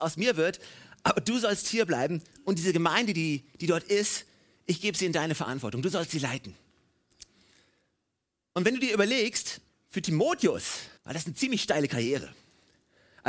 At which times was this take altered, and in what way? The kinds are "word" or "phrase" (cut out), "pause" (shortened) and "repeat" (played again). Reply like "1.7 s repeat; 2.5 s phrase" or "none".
9.7 s pause; 11.0 s pause